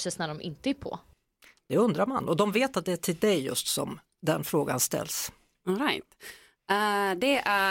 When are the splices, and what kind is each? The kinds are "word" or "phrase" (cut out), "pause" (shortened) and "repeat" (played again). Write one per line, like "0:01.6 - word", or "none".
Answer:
none